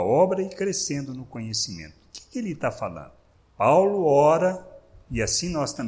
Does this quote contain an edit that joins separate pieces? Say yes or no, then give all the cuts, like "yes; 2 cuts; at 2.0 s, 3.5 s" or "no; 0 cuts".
no; 0 cuts